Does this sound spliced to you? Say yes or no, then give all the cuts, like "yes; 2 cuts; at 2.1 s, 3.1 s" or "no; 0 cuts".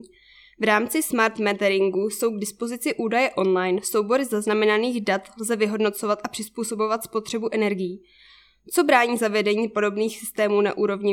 no; 0 cuts